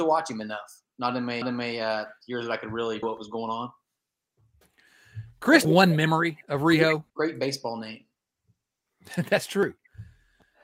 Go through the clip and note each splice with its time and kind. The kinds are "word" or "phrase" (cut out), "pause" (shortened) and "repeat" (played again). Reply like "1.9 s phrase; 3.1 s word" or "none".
1.4 s repeat; 3.0 s word; 5.6 s phrase; 7.1 s pause